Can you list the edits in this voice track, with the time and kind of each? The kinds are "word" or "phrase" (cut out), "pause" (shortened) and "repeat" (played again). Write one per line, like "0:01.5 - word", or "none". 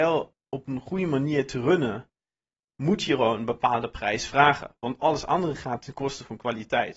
none